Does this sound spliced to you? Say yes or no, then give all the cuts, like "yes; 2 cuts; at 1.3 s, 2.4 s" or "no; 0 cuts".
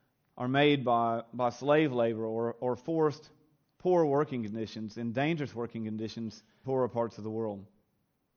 yes; 1 cut; at 6.6 s